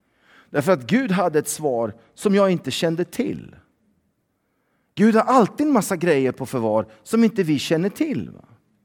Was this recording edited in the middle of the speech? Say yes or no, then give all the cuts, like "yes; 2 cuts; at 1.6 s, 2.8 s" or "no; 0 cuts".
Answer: no; 0 cuts